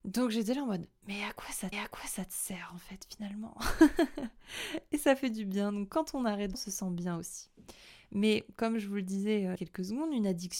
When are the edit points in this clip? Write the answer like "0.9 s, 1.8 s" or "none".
1.7 s, 6.5 s, 9.6 s